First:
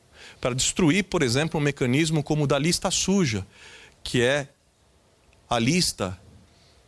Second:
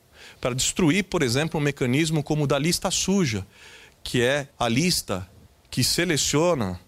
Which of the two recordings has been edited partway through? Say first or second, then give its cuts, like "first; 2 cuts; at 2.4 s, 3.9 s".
second; 2 cuts; at 4.5 s, 5.5 s